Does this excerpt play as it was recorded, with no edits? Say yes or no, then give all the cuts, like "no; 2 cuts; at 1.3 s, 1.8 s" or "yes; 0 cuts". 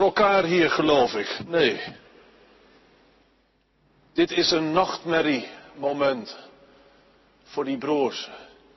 yes; 0 cuts